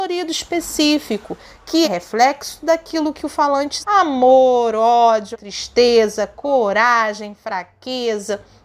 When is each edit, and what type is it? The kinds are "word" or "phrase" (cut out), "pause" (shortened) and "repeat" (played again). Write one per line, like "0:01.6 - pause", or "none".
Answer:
0:01.8 - word
0:03.8 - word
0:05.3 - word